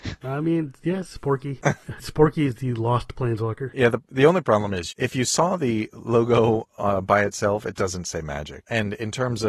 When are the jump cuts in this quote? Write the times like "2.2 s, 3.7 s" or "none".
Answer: none